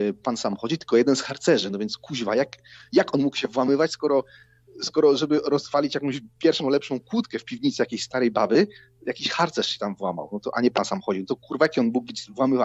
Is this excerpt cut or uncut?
uncut